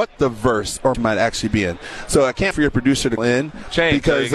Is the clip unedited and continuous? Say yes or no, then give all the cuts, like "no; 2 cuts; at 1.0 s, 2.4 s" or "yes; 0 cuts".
no; 3 cuts; at 0.9 s, 2.5 s, 3.2 s